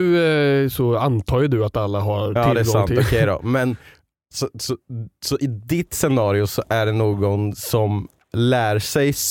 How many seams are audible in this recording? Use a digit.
0